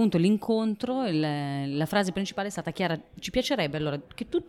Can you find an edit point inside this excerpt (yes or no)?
no